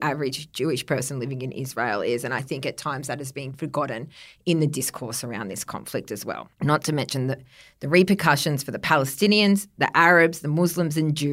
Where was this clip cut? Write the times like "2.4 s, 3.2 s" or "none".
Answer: none